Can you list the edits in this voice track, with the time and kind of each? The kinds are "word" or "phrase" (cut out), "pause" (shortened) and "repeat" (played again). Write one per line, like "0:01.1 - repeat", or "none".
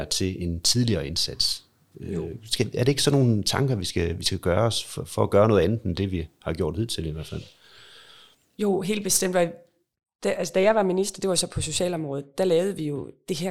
none